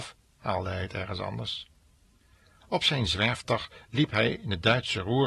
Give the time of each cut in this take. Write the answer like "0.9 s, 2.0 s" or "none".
none